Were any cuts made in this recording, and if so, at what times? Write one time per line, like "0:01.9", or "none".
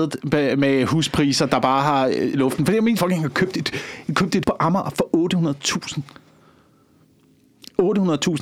0:02.3
0:03.0
0:04.4